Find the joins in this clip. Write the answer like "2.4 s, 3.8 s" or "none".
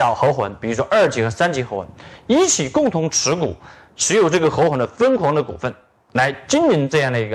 none